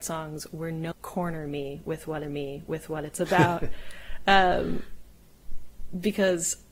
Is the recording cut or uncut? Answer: cut